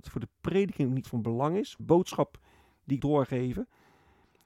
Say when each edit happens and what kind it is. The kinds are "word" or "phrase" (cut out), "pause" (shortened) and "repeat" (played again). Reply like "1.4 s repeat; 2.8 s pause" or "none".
1.0 s word; 1.8 s word; 3.0 s word